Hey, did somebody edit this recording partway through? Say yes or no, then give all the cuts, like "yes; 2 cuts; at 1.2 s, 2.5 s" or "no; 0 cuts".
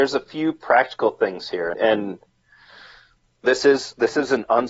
yes; 2 cuts; at 1.7 s, 3.4 s